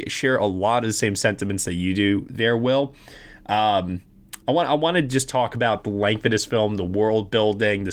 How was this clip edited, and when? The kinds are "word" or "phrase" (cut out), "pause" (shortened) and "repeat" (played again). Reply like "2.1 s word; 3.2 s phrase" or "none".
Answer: 4.4 s pause